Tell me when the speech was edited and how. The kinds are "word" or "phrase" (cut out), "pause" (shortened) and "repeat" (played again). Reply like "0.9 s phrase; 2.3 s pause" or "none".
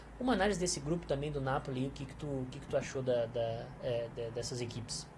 none